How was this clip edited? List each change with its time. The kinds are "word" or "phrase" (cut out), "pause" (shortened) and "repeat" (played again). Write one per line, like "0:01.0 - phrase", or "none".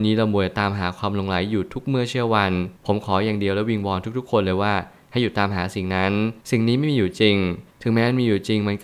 0:02.8 - pause
0:06.4 - pause
0:07.7 - pause